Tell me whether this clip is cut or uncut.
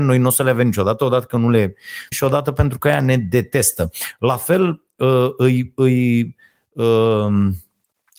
cut